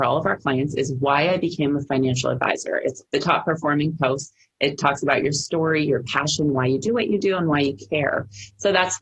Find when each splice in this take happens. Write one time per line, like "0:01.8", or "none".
0:03.0